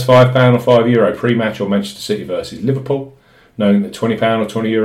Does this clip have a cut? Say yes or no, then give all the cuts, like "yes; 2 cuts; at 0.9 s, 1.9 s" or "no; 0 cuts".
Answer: no; 0 cuts